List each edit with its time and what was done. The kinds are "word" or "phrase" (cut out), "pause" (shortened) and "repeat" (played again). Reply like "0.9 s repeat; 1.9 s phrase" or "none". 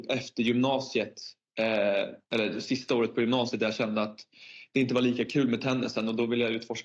2.2 s pause